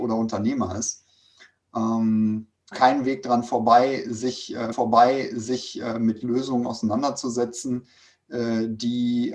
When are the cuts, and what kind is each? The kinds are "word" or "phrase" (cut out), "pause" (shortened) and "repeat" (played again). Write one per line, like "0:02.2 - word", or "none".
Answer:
0:02.7 - phrase
0:04.7 - repeat

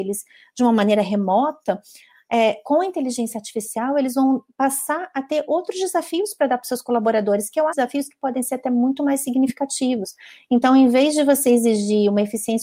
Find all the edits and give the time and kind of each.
0:07.7 - phrase

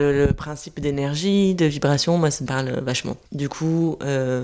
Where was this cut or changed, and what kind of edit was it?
0:02.5 - phrase
0:03.3 - pause

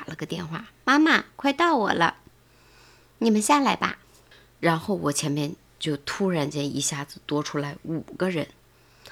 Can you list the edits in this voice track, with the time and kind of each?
0:04.0 - pause

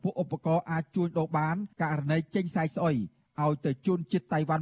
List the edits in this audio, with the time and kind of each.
0:01.7 - pause

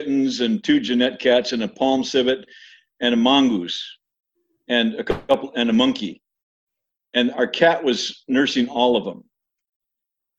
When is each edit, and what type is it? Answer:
none

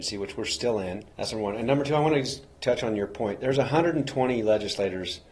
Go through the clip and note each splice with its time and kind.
0:01.1 - pause

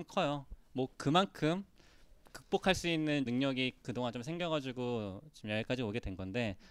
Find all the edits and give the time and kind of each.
0:03.3 - word

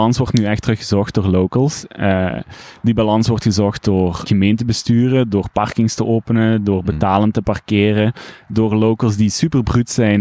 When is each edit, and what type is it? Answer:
0:04.3 - word

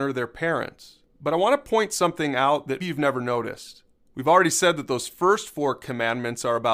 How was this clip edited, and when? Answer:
0:02.8 - word

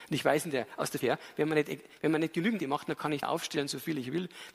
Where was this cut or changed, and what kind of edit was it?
0:01.0 - word
0:02.6 - word
0:03.2 - word

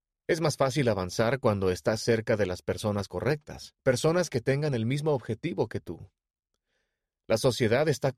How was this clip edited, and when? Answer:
0:03.8 - pause

